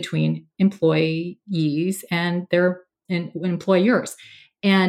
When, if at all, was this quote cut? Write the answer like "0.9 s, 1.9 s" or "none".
3.1 s